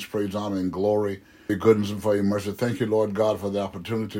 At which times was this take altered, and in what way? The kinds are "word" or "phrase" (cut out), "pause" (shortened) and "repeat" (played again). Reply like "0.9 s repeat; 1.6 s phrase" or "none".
1.5 s word